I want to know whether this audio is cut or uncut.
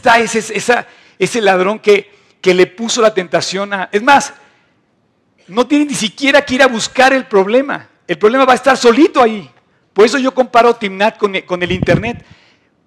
uncut